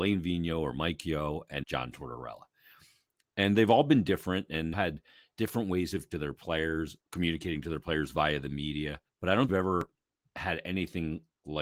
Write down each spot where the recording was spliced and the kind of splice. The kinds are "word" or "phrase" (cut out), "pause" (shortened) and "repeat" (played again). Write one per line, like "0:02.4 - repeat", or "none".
0:01.6 - word
0:04.7 - phrase
0:06.1 - phrase
0:07.0 - pause
0:09.1 - pause
0:09.5 - phrase